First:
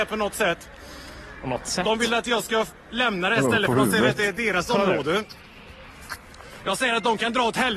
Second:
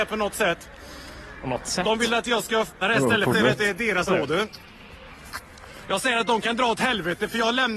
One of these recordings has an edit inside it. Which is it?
second; 3 cuts; at 2.8 s, 3.3 s, 4.1 s

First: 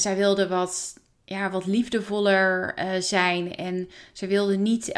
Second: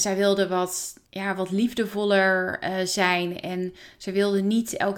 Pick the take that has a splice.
second; 1 cut; at 1.1 s

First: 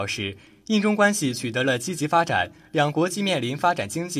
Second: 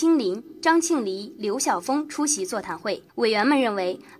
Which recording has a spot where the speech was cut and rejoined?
second; 1 cut; at 3.1 s

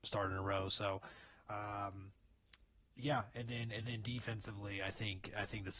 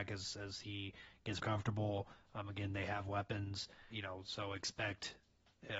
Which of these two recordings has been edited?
second; 2 cuts; at 1.4 s, 3.9 s

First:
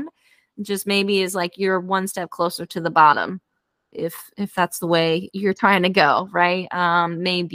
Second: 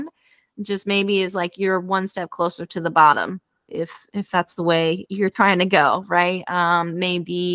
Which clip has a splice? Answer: second; 1 cut; at 3.6 s

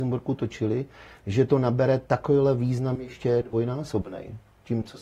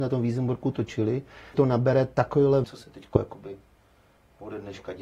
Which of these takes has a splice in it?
second; 2 cuts; at 1.5 s, 2.6 s

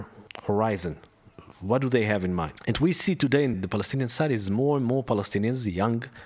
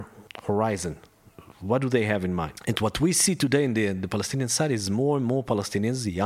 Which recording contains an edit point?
first; 2 cuts; at 2.7 s, 3.5 s

